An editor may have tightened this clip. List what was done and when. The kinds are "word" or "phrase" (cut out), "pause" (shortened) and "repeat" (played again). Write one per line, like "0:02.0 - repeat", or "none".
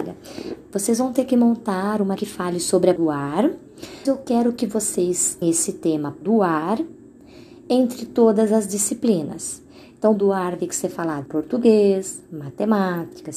0:02.2 - word
0:03.0 - word
0:04.0 - word
0:05.4 - word
0:06.2 - word
0:10.1 - word
0:10.6 - word
0:11.2 - word